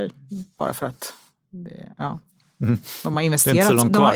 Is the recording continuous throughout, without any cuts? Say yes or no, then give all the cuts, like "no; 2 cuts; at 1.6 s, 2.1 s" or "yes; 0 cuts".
yes; 0 cuts